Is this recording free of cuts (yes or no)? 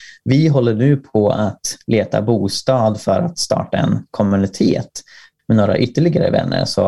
yes